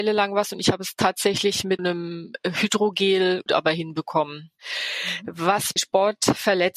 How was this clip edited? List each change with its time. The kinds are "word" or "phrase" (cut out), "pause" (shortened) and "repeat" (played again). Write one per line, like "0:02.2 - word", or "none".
0:01.8 - word
0:03.5 - phrase
0:05.8 - word